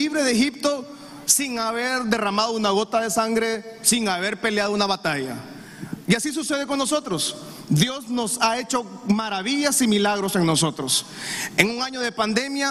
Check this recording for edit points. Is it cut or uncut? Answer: uncut